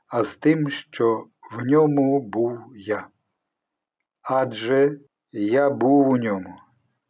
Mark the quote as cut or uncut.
uncut